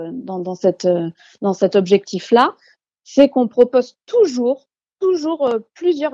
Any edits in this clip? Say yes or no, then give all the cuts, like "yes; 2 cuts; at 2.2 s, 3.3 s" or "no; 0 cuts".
no; 0 cuts